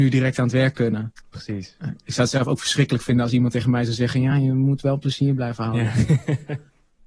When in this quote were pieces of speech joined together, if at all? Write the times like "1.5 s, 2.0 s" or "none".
none